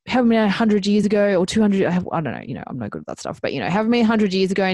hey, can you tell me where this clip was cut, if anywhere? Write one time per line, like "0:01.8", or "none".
none